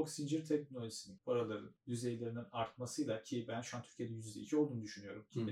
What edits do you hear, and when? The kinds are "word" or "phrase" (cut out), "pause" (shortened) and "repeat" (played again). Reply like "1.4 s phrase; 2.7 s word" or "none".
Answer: 1.2 s word; 1.8 s word